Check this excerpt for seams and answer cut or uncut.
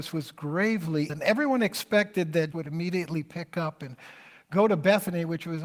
cut